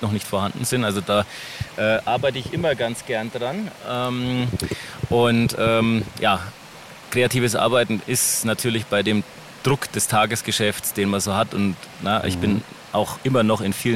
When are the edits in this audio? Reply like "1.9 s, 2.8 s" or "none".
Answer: none